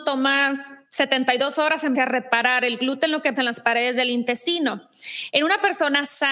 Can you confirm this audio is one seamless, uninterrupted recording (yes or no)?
no